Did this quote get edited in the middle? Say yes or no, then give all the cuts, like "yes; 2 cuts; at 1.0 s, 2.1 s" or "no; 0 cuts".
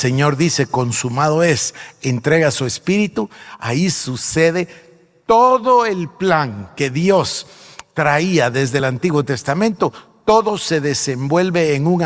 no; 0 cuts